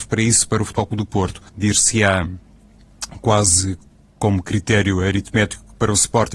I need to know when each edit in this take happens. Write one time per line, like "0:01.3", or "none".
0:01.5